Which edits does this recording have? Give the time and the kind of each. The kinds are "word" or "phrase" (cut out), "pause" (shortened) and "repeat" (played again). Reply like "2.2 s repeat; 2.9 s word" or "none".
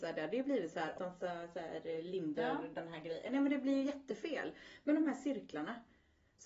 1.0 s phrase; 2.4 s word